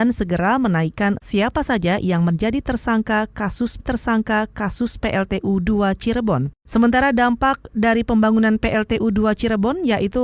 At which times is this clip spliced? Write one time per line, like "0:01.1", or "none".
0:01.2
0:03.8